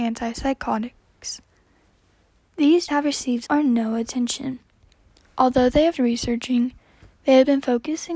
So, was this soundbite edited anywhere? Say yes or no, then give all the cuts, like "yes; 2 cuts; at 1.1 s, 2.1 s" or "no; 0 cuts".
yes; 3 cuts; at 2.9 s, 3.5 s, 5.9 s